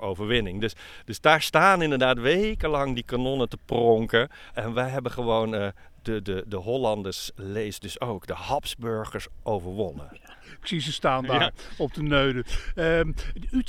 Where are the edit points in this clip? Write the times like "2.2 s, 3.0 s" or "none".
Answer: none

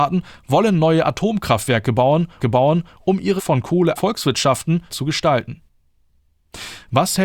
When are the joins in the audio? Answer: 2.4 s, 3.4 s, 4.0 s, 4.9 s

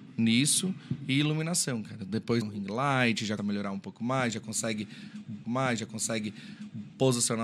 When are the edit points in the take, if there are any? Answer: 2.4 s, 3.4 s, 5.4 s

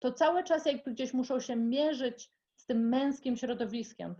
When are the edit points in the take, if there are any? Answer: none

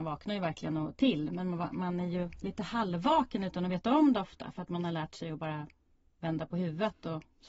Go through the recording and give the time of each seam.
none

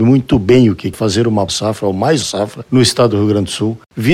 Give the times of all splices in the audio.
0.9 s, 1.5 s, 2.2 s

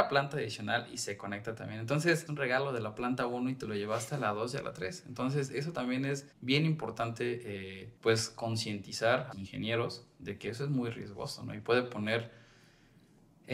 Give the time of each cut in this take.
2.3 s, 6.3 s, 8.0 s, 9.3 s

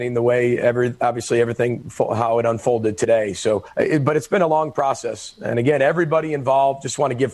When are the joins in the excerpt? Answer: none

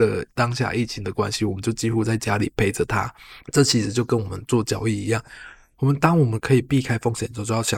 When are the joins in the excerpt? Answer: 3.4 s

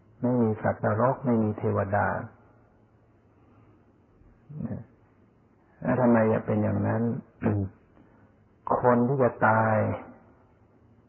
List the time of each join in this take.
none

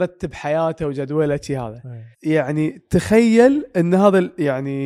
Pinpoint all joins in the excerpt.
2.1 s

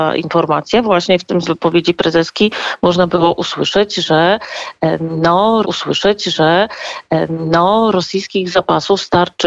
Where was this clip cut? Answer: 1.4 s, 5.6 s

